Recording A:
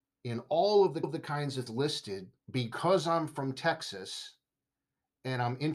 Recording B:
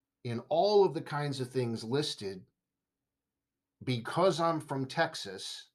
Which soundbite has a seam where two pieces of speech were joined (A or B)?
A